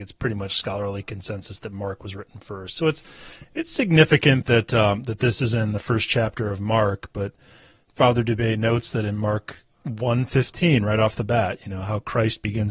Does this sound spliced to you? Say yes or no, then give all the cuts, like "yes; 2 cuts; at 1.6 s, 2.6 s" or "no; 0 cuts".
no; 0 cuts